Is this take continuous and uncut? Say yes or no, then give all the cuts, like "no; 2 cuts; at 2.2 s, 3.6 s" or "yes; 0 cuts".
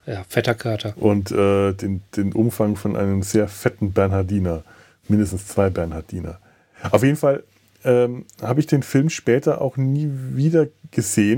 yes; 0 cuts